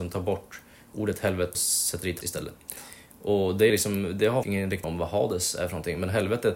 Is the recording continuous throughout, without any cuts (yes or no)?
no